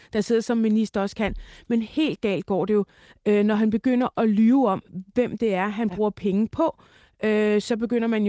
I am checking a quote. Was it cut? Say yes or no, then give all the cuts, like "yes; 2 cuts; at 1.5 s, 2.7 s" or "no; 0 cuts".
no; 0 cuts